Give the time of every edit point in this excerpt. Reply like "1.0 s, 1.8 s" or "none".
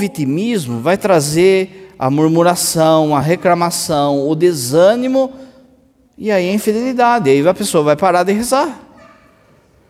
none